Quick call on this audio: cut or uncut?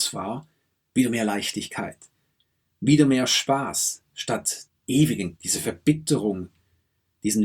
cut